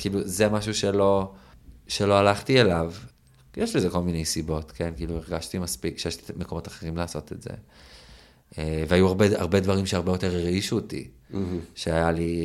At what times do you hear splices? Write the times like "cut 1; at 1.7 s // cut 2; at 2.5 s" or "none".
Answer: none